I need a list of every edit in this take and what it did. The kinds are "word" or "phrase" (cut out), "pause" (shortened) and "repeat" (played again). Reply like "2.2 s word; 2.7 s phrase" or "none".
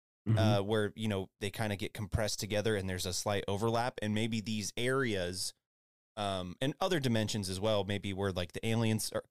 none